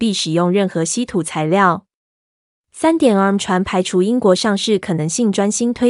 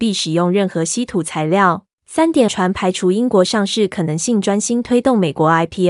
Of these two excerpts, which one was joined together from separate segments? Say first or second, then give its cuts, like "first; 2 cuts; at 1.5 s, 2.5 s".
second; 2 cuts; at 1.9 s, 2.5 s